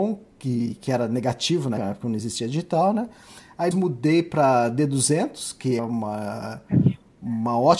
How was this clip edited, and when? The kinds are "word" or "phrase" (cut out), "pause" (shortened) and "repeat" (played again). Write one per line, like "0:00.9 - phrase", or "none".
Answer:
0:01.8 - word
0:03.7 - word
0:05.8 - word